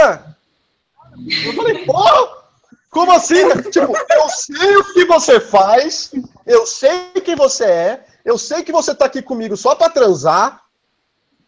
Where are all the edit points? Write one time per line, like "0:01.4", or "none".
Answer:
none